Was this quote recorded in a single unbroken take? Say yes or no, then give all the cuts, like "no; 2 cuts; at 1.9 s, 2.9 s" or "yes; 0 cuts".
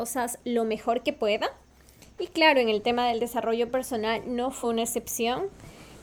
yes; 0 cuts